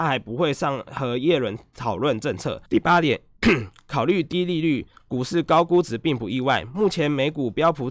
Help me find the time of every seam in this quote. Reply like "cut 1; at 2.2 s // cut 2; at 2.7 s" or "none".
cut 1; at 2.7 s